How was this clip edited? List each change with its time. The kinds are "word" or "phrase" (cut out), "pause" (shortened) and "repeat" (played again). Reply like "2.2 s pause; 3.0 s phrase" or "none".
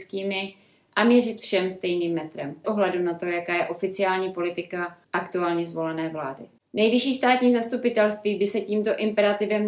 2.6 s word; 5.0 s pause